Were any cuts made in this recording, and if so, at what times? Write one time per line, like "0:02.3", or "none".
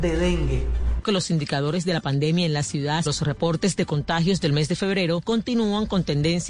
0:01.0
0:03.1